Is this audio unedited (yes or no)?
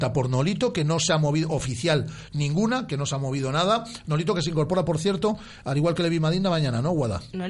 yes